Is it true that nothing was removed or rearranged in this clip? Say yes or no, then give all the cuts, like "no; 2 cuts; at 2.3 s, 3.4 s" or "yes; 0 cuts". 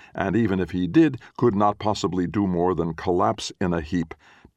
yes; 0 cuts